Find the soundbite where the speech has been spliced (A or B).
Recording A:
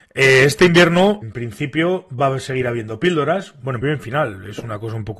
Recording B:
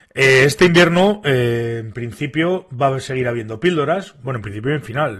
A